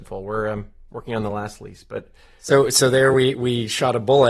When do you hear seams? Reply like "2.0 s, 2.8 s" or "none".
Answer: none

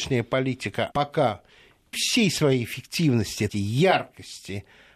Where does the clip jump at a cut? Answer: 0.9 s, 1.9 s, 3.5 s

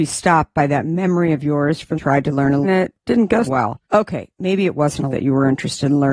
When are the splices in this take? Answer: 1.9 s, 2.6 s, 3.4 s, 3.8 s, 5.1 s

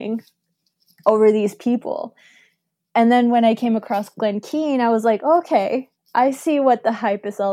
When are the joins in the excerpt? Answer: none

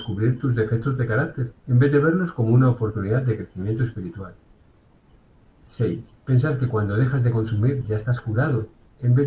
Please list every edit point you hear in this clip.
1.6 s, 6.2 s

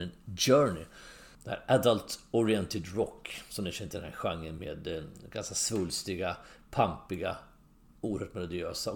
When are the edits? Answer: none

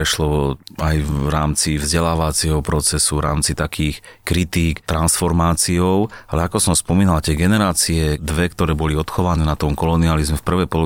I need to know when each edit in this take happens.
none

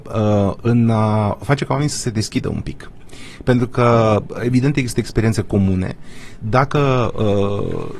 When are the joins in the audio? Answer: none

